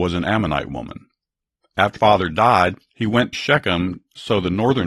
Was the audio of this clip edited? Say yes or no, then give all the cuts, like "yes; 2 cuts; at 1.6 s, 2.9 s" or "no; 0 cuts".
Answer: yes; 2 cuts; at 2.0 s, 3.3 s